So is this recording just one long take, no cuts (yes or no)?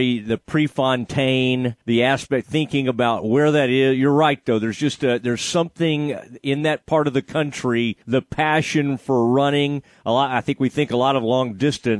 no